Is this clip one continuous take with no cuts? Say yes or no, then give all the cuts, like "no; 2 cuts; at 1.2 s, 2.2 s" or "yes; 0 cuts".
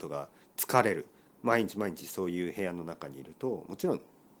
yes; 0 cuts